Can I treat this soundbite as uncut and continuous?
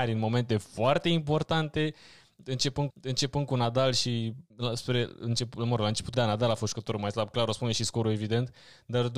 no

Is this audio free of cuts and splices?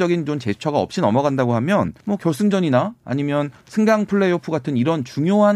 no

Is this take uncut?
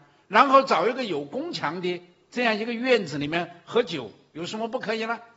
yes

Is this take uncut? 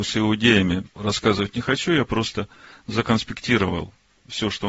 yes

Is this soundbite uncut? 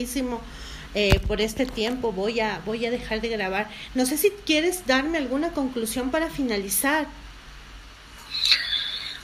yes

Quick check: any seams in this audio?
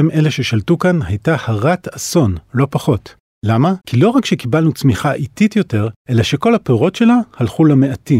yes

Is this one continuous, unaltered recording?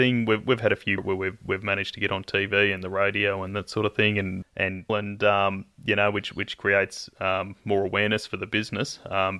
no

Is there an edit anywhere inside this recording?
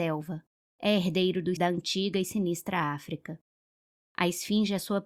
yes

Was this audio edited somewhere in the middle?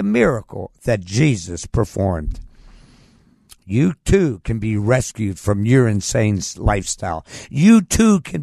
no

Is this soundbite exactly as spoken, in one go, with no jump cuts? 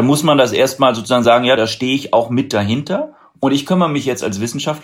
yes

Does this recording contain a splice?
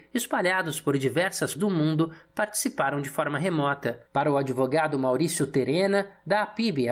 yes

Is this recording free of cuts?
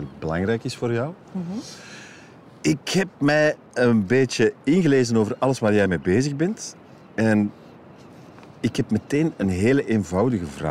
yes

